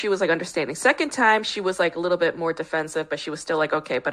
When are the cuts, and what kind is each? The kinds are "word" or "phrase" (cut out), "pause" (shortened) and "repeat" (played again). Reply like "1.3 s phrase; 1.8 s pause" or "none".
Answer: none